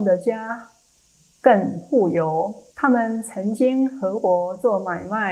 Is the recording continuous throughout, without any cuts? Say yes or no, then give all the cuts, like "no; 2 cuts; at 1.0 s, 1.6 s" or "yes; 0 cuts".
no; 1 cut; at 2.7 s